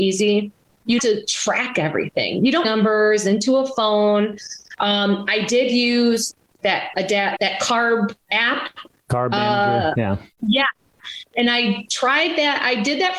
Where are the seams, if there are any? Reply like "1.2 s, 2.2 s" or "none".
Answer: 1.0 s, 2.6 s, 6.9 s, 7.4 s, 8.2 s, 10.3 s